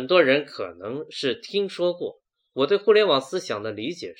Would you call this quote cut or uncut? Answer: uncut